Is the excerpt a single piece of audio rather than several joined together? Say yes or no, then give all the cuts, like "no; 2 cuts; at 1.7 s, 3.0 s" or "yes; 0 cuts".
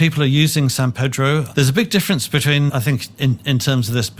no; 1 cut; at 2.7 s